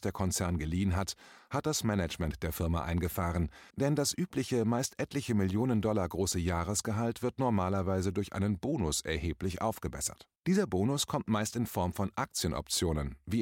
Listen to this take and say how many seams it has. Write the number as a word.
two